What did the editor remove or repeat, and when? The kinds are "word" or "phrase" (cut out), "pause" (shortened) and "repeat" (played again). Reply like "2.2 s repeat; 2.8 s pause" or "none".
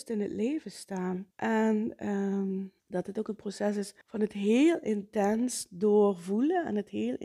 1.3 s pause; 2.8 s pause; 4.0 s pause